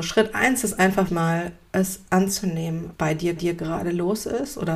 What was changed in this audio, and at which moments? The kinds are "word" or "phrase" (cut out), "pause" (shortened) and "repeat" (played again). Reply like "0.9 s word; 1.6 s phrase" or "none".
1.1 s word; 2.9 s word; 3.4 s repeat

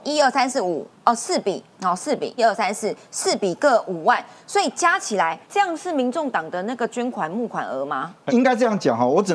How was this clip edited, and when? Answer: 0.9 s pause; 2.4 s word; 5.4 s pause; 8.3 s word

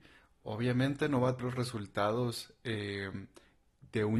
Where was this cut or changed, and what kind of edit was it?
1.4 s word

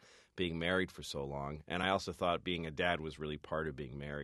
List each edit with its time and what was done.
none

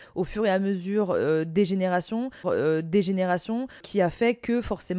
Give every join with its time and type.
2.4 s repeat

